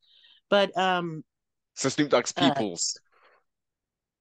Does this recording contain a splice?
no; 0 cuts

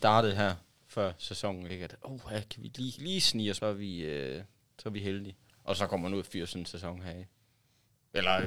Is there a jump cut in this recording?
yes; 3 cuts; at 3.0 s, 3.6 s, 5.5 s

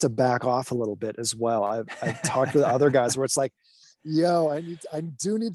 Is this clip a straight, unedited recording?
yes; 0 cuts

